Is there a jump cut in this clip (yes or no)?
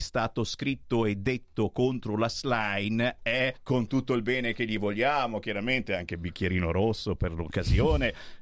yes